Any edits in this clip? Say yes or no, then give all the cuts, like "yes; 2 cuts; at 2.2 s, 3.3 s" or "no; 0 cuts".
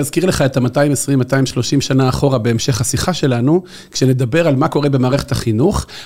no; 0 cuts